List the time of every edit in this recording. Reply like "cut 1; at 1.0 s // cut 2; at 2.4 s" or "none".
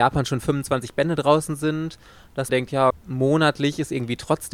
cut 1; at 2.5 s // cut 2; at 2.9 s